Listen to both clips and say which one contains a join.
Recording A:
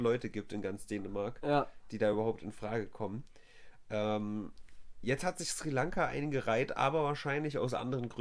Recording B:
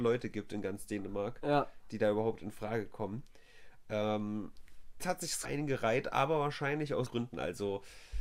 B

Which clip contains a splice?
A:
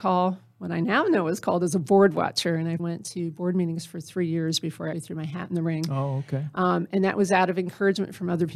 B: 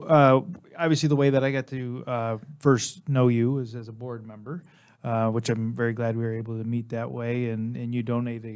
A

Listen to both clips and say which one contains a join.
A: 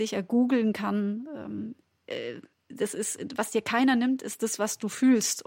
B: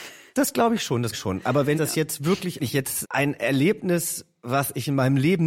B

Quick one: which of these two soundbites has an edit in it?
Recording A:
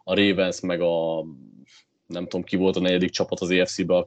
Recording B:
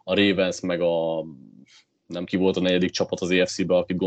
B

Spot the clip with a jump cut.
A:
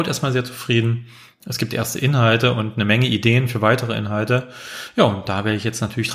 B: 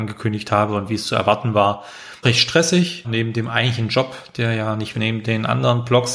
B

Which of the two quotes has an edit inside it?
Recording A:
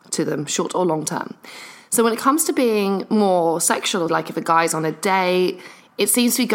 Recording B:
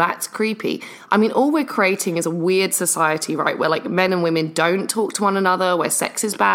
A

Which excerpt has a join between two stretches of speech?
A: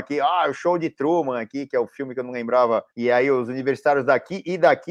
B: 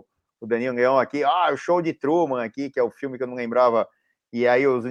A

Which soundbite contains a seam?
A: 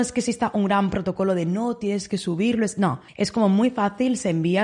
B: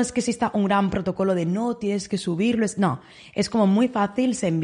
A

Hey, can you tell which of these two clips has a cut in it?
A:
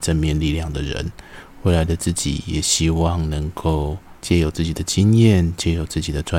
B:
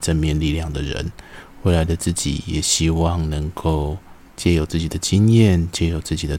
A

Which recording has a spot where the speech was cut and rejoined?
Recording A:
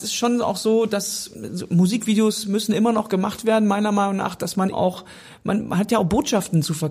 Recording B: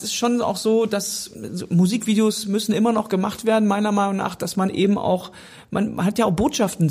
A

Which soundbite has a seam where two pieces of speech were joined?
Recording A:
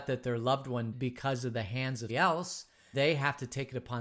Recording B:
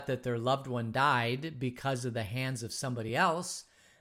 A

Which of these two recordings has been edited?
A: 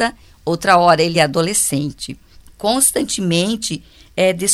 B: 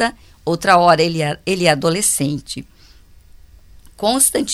A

